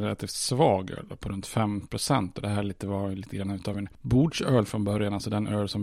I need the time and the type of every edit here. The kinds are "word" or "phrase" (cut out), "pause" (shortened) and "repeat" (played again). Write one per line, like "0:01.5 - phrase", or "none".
none

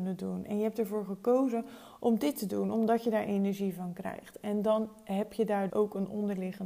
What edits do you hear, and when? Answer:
0:05.7 - word

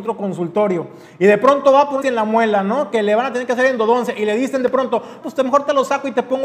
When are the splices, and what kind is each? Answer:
0:02.0 - word
0:05.2 - word

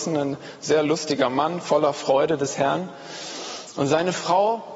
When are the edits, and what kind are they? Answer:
none

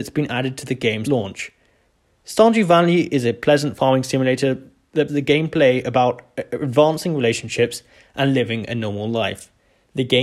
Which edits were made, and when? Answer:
0:01.0 - word
0:05.1 - word

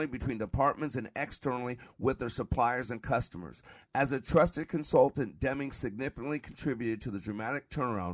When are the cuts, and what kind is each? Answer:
none

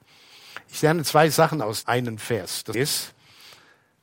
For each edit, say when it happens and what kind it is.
0:01.8 - word
0:02.7 - word

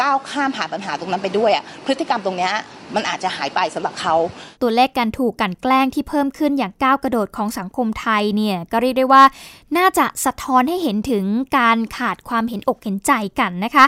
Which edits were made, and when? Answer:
0:04.6 - pause

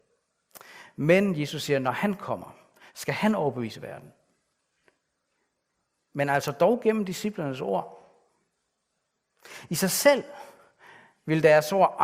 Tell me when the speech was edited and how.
none

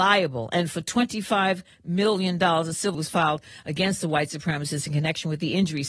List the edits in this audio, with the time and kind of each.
0:02.9 - word

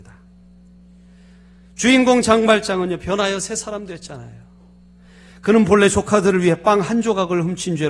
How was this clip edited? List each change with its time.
none

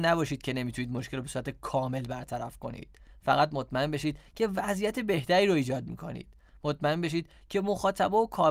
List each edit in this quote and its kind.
none

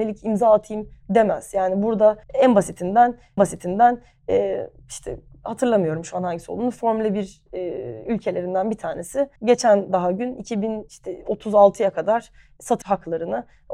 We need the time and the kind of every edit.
0:02.2 - pause
0:03.4 - repeat
0:09.4 - pause
0:12.8 - word

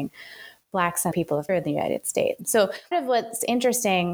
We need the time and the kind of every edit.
0:01.1 - word
0:01.5 - word
0:02.9 - word

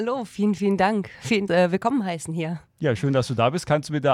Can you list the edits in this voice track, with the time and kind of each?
0:01.5 - phrase

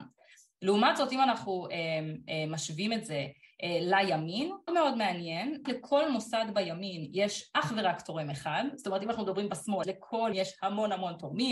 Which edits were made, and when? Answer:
0:04.7 - word
0:05.6 - word
0:09.8 - word
0:10.3 - word

